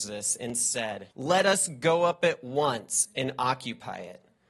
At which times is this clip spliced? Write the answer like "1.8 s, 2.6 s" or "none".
1.1 s